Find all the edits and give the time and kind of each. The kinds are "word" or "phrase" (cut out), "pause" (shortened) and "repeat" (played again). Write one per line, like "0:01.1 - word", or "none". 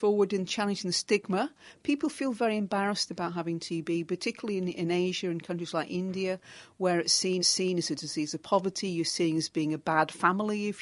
0:07.4 - repeat